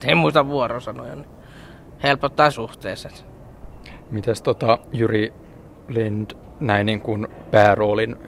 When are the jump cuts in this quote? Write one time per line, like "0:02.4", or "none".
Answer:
0:02.5
0:04.8
0:06.4